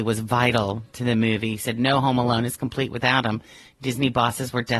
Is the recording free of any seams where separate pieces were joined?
yes; 0 cuts

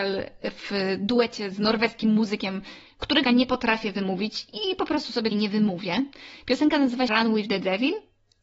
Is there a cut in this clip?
yes; 3 cuts; at 3.2 s, 5.3 s, 7.1 s

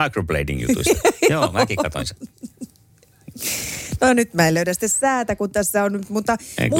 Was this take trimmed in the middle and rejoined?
no; 0 cuts

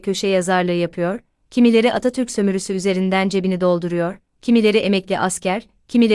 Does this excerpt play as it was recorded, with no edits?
yes; 0 cuts

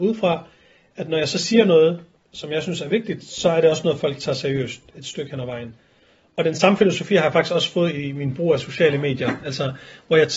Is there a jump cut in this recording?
no; 0 cuts

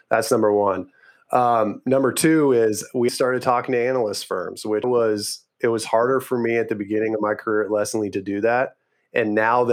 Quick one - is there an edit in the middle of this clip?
yes; 2 cuts; at 3.1 s, 4.8 s

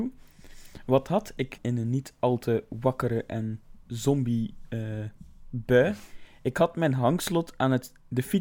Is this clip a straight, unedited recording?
no; 1 cut; at 1.6 s

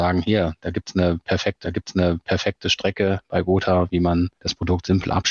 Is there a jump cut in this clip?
yes; 2 cuts; at 1.6 s, 4.4 s

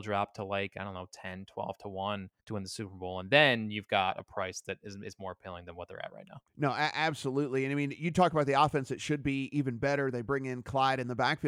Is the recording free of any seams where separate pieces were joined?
no; 2 cuts; at 2.4 s, 6.5 s

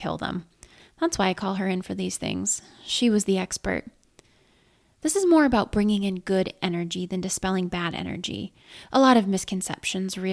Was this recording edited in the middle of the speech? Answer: no; 0 cuts

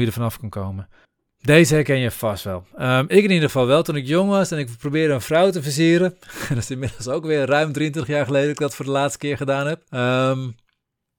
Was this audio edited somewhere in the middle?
yes; 2 cuts; at 1.0 s, 9.9 s

